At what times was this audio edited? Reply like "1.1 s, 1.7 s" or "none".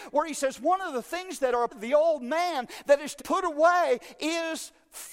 1.7 s, 3.2 s